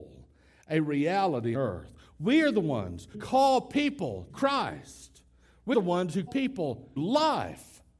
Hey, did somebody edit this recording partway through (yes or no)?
yes